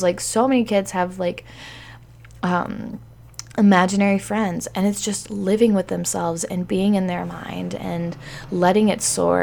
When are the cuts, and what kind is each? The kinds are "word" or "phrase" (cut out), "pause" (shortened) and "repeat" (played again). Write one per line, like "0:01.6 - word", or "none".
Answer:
none